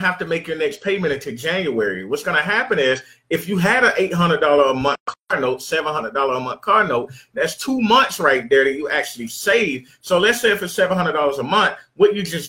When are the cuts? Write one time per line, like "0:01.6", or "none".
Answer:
none